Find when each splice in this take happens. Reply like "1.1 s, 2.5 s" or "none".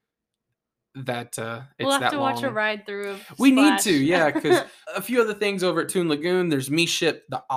4.9 s